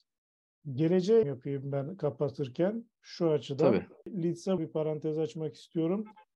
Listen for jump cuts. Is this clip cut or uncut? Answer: cut